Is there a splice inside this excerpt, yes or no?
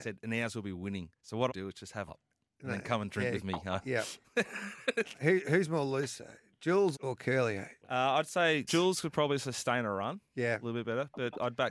yes